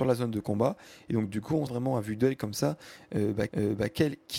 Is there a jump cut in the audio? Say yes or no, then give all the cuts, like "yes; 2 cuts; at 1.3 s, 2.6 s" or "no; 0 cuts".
yes; 2 cuts; at 1.7 s, 3.5 s